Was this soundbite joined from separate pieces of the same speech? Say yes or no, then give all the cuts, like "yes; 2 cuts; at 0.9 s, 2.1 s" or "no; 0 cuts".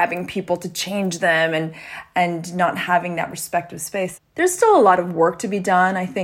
no; 0 cuts